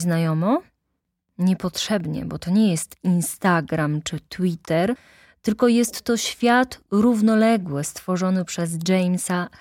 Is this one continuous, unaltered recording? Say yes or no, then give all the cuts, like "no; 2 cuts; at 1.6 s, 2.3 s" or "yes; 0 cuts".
yes; 0 cuts